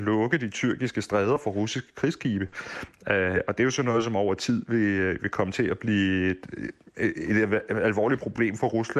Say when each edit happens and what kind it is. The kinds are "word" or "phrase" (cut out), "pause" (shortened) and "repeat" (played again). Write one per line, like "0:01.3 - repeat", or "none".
none